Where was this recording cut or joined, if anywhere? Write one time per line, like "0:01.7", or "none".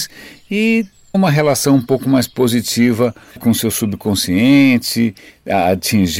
0:01.1
0:03.4